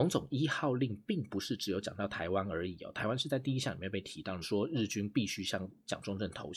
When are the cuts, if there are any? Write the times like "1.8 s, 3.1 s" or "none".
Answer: 4.4 s